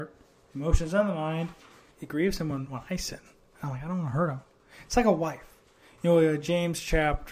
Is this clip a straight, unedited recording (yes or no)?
yes